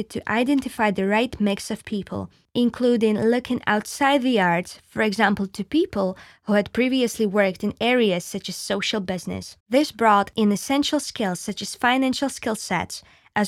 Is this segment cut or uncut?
cut